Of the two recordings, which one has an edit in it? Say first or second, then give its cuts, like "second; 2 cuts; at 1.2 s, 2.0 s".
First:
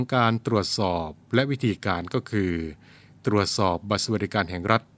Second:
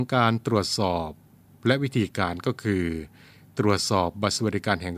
first; 1 cut; at 1.2 s